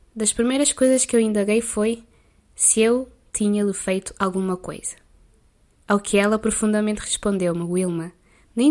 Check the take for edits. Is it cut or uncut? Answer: uncut